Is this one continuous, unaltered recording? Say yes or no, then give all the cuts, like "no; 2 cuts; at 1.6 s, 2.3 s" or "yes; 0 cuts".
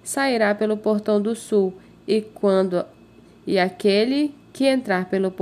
yes; 0 cuts